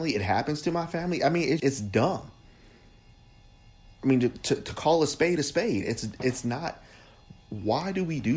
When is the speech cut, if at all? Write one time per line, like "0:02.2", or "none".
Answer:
0:01.6